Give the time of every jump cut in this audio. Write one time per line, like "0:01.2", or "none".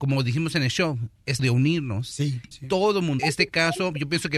0:01.4
0:02.5
0:03.2